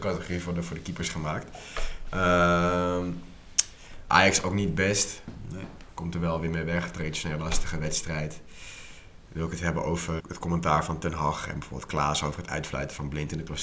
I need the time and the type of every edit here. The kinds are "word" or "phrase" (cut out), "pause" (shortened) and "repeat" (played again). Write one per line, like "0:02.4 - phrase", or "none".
0:10.2 - word